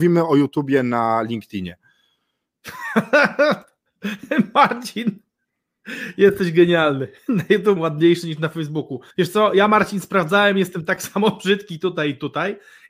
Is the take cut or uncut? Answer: cut